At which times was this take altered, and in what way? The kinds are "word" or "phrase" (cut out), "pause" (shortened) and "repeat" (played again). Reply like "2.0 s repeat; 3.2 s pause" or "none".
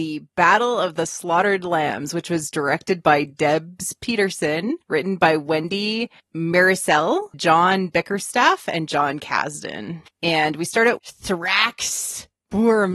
4.8 s pause; 7.3 s word; 10.1 s pause; 11.0 s word